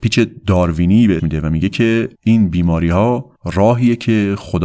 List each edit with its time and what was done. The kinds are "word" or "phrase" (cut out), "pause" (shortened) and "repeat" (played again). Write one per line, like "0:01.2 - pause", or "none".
0:01.2 - word
0:02.1 - pause
0:03.4 - pause

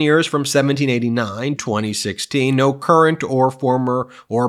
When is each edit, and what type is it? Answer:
0:01.6 - word

